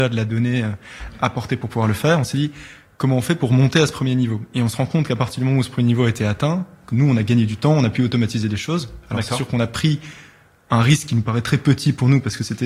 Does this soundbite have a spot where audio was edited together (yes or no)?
no